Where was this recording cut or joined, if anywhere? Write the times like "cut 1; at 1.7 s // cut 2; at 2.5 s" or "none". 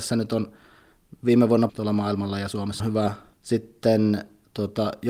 cut 1; at 1.7 s // cut 2; at 2.8 s // cut 3; at 3.3 s